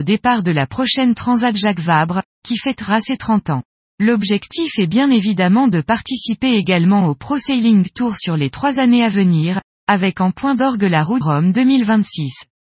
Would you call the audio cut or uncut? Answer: cut